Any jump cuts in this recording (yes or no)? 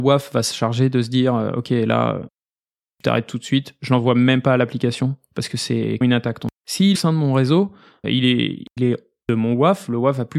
yes